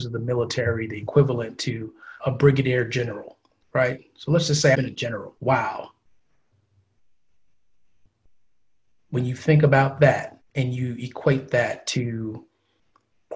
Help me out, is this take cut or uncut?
cut